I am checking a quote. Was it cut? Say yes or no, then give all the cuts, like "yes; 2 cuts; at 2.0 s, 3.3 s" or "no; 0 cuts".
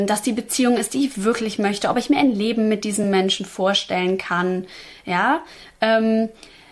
no; 0 cuts